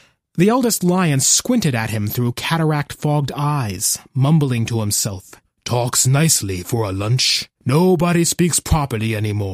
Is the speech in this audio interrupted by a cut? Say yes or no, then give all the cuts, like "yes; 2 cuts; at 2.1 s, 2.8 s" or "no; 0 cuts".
yes; 2 cuts; at 5.4 s, 7.6 s